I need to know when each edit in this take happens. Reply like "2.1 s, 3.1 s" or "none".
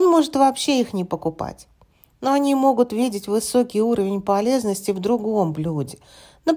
none